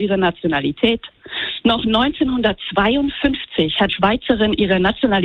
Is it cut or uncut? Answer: cut